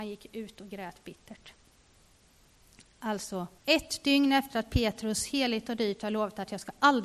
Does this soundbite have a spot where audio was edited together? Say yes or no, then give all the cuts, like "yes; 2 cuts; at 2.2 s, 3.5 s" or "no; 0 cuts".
yes; 1 cut; at 3.6 s